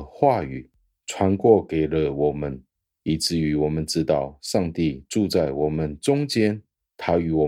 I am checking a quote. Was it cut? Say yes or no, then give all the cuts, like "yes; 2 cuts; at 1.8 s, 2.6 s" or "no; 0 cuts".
no; 0 cuts